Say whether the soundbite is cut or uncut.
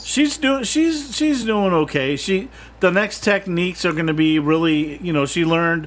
uncut